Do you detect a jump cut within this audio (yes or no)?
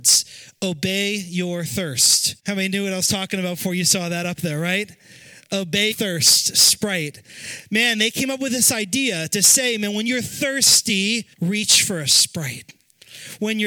yes